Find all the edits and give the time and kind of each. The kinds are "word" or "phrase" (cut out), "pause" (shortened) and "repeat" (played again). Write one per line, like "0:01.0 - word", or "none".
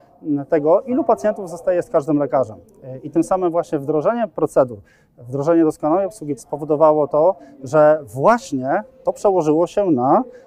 0:06.4 - word